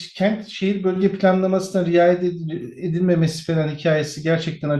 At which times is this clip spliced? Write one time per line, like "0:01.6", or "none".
none